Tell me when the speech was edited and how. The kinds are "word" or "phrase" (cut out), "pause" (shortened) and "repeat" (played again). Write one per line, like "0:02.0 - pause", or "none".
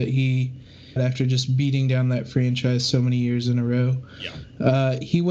0:01.0 - word